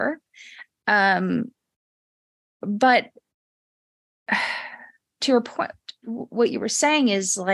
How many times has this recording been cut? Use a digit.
0